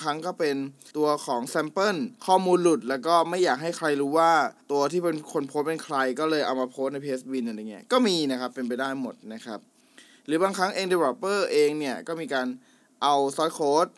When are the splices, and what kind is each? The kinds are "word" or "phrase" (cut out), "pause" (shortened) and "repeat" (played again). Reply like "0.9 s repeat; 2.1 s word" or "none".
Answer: 0.9 s pause; 2.2 s pause; 4.6 s pause